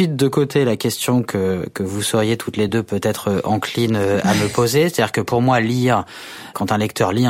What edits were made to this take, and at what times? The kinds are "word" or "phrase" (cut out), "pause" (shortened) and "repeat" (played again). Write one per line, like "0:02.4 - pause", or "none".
none

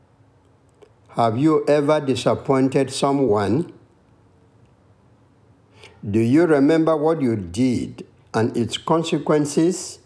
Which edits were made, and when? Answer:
none

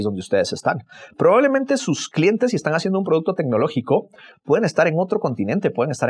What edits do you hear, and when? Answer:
none

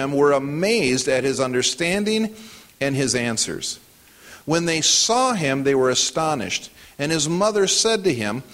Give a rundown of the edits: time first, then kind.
none

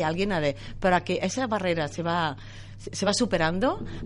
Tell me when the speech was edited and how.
none

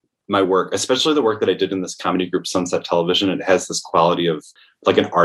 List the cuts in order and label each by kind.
none

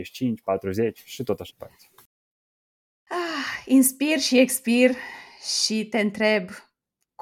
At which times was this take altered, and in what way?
0:01.5 - word

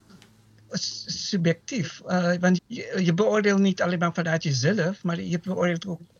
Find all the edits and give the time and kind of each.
0:02.6 - word

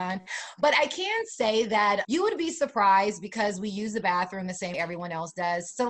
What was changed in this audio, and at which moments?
0:02.0 - word
0:04.7 - word

